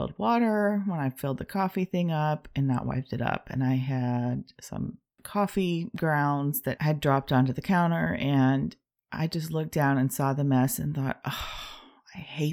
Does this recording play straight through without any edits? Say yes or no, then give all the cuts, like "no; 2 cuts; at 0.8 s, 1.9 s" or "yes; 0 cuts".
yes; 0 cuts